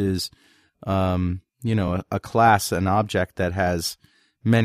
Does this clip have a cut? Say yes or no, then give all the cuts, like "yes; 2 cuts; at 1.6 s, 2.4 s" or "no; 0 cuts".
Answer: no; 0 cuts